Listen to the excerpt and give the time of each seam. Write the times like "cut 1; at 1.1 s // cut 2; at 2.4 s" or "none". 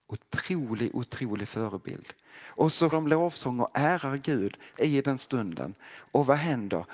cut 1; at 2.9 s // cut 2; at 4.7 s // cut 3; at 5.2 s